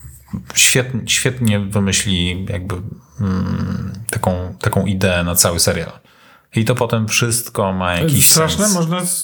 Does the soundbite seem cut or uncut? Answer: uncut